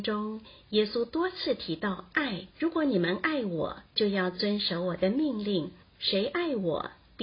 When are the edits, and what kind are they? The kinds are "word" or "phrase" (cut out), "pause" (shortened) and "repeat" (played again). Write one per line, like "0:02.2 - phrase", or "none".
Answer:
0:02.5 - pause
0:03.9 - pause
0:05.8 - pause